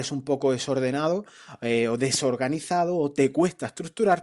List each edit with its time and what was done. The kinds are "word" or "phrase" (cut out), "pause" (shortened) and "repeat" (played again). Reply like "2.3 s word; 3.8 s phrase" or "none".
none